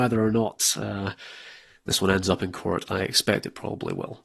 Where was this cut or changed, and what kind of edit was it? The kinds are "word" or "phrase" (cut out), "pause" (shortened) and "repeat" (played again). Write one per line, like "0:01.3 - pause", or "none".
none